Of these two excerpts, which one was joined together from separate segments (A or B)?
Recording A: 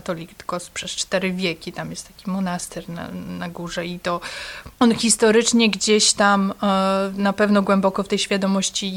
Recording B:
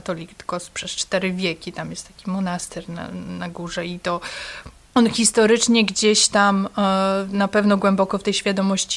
A